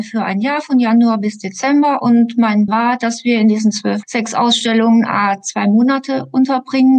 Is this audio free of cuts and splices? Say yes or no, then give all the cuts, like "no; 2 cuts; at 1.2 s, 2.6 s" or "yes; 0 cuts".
no; 2 cuts; at 2.7 s, 4.0 s